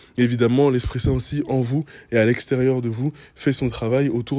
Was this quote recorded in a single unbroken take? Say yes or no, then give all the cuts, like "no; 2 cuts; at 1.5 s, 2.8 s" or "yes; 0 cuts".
yes; 0 cuts